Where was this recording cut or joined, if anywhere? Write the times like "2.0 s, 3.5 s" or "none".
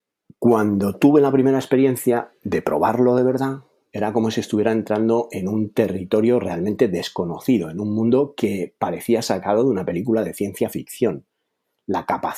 none